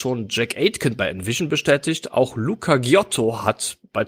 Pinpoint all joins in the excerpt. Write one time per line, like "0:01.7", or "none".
none